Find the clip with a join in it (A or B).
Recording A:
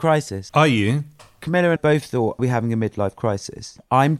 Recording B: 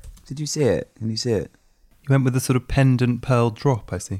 A